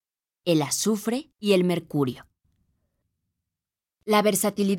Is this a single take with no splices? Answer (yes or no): no